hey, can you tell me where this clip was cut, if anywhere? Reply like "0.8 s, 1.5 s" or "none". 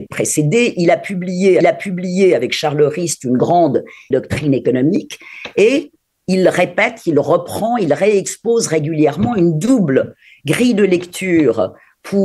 1.6 s, 4.1 s